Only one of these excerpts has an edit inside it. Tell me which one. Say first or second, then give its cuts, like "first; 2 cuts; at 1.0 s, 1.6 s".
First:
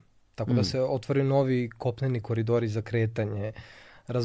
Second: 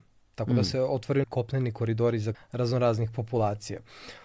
second; 2 cuts; at 1.2 s, 2.3 s